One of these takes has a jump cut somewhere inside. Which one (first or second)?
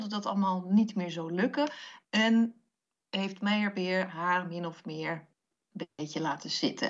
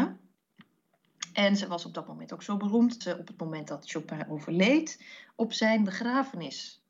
second